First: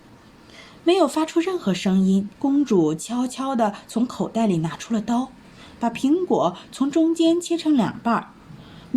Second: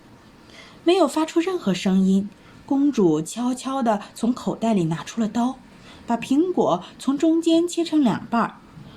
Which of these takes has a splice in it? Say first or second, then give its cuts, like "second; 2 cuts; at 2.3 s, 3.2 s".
first; 1 cut; at 2.3 s